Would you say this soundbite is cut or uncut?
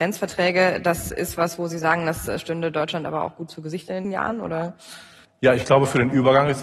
cut